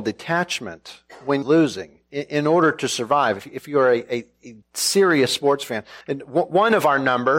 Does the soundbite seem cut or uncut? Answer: cut